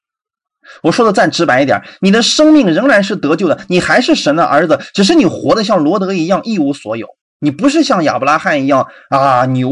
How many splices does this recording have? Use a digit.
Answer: 1